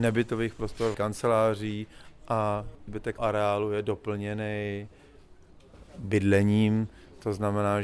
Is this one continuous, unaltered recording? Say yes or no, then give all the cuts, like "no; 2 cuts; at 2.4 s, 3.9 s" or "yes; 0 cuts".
no; 3 cuts; at 0.9 s, 2.9 s, 3.2 s